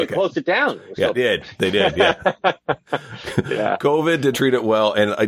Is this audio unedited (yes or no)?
no